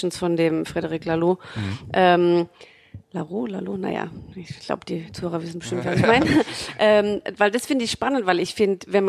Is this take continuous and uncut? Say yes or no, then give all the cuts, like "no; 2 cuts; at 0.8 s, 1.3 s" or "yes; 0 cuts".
no; 1 cut; at 3.0 s